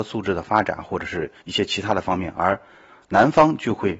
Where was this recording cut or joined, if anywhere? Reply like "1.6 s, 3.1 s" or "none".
1.4 s